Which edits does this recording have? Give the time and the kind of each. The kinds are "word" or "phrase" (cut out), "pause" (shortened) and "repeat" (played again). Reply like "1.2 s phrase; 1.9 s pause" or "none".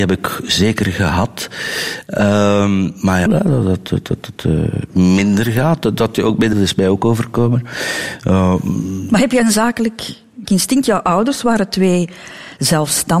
3.3 s phrase; 6.5 s phrase; 10.5 s phrase

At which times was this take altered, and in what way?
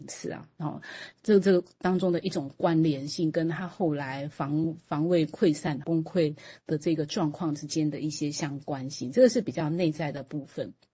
5.8 s word

